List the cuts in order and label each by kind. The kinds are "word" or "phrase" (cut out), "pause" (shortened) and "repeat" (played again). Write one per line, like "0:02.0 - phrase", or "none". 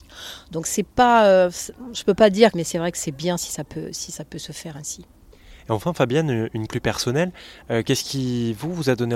0:02.5 - phrase
0:06.7 - word